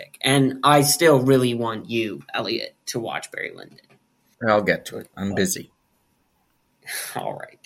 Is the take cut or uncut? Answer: uncut